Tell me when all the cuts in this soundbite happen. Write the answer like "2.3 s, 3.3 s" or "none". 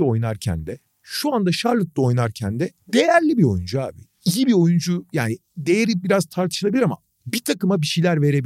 2.8 s